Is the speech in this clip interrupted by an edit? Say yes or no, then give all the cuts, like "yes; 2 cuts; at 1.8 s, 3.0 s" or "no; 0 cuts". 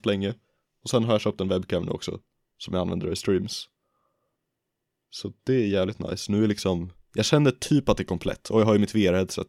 no; 0 cuts